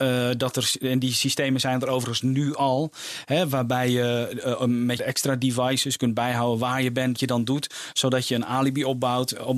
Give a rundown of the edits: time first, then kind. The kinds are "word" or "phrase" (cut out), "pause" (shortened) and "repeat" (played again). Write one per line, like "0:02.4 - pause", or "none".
0:05.0 - phrase
0:07.2 - word

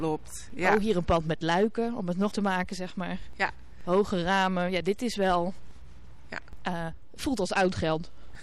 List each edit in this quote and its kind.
0:02.3 - word

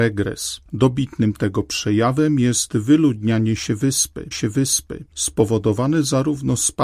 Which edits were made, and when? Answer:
0:04.3 - repeat

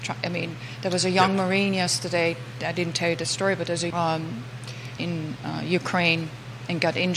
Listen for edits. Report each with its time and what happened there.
0:03.9 - phrase
0:05.0 - phrase

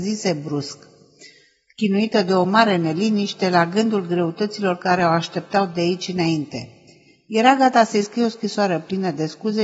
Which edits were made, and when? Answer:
none

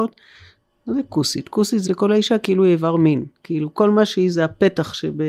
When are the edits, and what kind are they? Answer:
0:01.9 - word

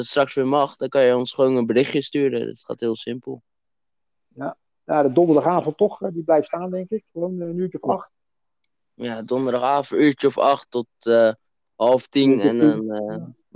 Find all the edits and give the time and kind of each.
none

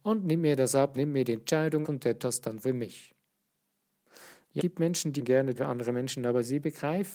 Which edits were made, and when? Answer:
0:00.9 - word
0:01.8 - word
0:02.2 - word
0:04.6 - word
0:05.2 - word
0:05.6 - word

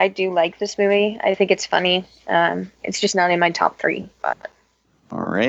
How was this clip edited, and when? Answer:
0:02.7 - pause
0:04.1 - pause

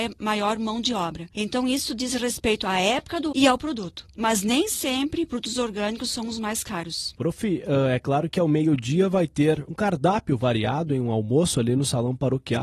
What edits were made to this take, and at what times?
0:03.3 - word

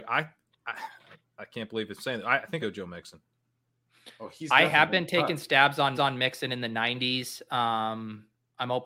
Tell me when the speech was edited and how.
0:02.6 - word
0:05.9 - repeat

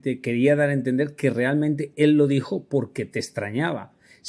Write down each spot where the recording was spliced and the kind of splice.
none

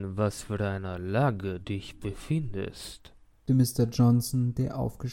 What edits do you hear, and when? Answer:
0:01.6 - word
0:03.5 - word

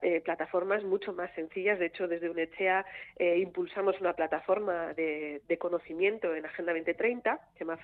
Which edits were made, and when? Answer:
none

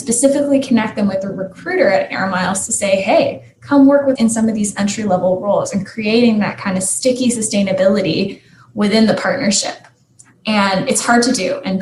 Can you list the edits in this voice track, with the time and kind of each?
0:04.2 - word

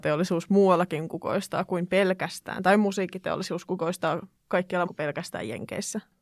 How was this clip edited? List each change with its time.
0:04.9 - word

